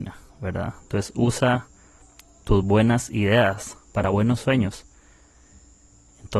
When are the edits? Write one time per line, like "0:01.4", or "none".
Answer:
none